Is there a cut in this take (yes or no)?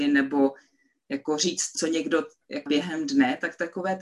yes